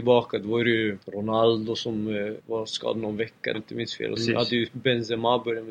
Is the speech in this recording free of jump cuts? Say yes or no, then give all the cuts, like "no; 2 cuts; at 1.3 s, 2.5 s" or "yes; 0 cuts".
no; 4 cuts; at 1.0 s, 2.4 s, 3.5 s, 4.2 s